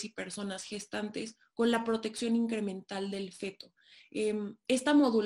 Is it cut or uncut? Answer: uncut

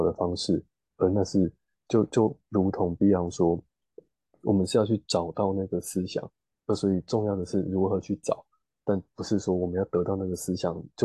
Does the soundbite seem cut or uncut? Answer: uncut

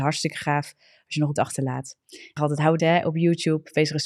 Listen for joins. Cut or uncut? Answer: cut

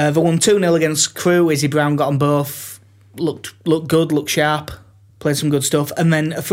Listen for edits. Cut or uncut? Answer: uncut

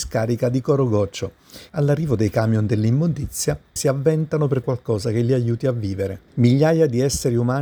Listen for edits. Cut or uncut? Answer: cut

